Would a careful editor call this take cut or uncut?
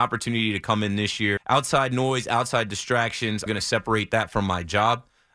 cut